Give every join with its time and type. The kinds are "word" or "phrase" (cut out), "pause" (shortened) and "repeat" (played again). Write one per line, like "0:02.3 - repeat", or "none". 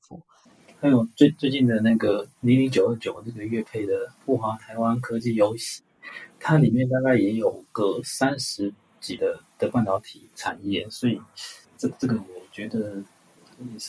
0:02.3 - pause
0:04.2 - pause
0:06.3 - pause
0:09.2 - word
0:10.3 - pause
0:11.6 - pause